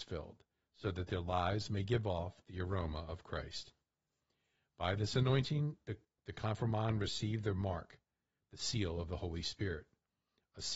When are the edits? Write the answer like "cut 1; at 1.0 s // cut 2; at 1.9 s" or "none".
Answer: cut 1; at 6.0 s